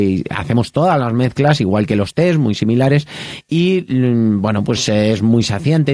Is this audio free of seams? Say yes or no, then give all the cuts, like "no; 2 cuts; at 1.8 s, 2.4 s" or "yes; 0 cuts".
yes; 0 cuts